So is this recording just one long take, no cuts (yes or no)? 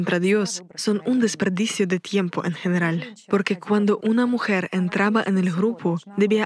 yes